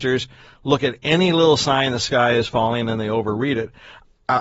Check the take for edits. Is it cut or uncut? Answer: uncut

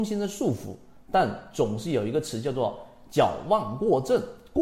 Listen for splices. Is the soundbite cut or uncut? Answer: uncut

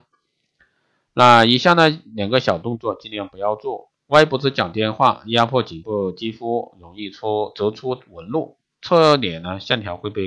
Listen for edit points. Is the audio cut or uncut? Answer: uncut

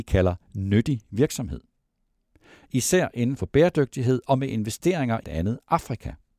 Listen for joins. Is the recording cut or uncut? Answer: cut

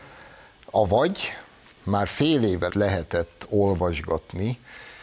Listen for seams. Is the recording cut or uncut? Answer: cut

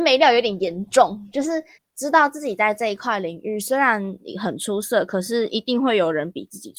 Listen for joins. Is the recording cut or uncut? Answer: cut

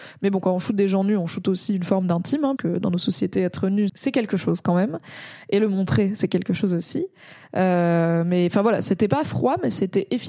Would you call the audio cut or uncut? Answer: cut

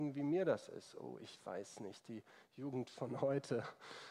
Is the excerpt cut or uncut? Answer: uncut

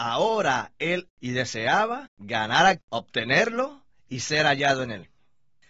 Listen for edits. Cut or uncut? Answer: cut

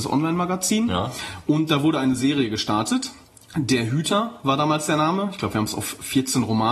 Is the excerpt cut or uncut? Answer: cut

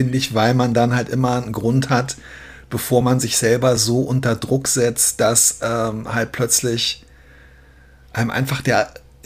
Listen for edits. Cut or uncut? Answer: uncut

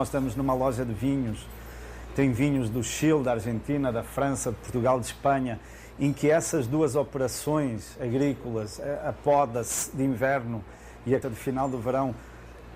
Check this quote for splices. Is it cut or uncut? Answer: cut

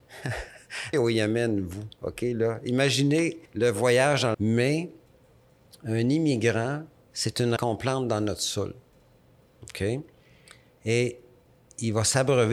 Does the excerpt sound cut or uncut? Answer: cut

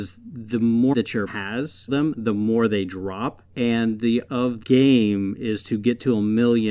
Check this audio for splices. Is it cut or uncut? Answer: cut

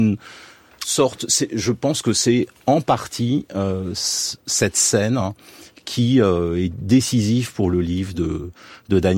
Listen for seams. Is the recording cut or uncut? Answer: uncut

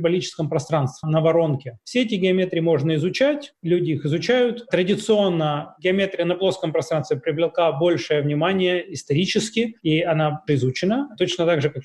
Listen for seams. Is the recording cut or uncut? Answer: cut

